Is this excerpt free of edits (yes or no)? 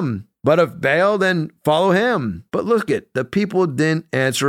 no